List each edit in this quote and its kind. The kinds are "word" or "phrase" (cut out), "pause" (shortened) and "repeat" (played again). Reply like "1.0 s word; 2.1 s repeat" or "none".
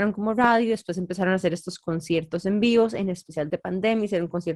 3.5 s word